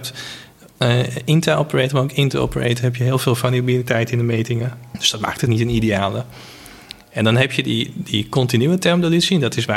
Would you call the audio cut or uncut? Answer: cut